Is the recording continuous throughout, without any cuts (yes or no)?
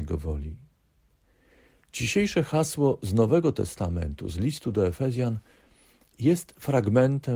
yes